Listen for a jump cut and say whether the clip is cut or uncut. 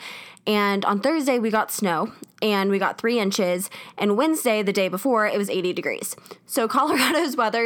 uncut